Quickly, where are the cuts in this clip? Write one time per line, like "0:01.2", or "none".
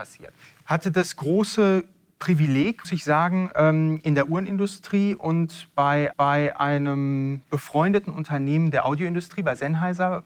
0:02.8
0:06.1